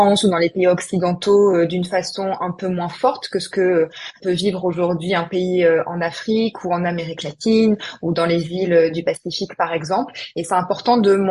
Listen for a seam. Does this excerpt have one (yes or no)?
no